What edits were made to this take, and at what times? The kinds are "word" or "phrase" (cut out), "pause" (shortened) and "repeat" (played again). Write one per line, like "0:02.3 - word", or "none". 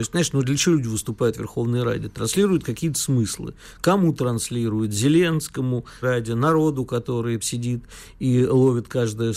0:06.0 - word
0:07.4 - word